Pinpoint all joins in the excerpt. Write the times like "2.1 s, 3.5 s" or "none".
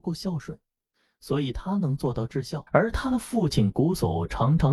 2.7 s